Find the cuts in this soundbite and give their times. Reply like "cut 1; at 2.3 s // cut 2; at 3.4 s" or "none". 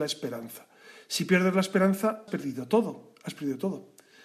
cut 1; at 2.3 s